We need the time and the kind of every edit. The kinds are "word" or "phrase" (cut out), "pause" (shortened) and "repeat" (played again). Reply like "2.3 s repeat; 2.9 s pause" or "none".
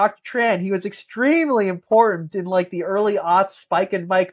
none